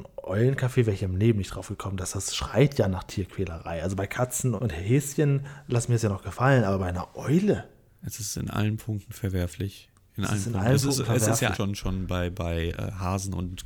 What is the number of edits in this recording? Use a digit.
2